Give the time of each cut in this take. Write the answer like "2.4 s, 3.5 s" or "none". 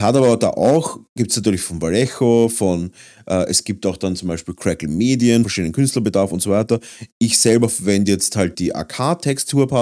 5.4 s, 8.5 s